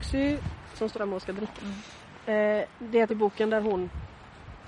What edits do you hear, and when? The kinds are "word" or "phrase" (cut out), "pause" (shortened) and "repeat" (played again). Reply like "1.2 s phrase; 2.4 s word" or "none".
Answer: 0.9 s word; 1.6 s word; 2.7 s pause; 3.1 s word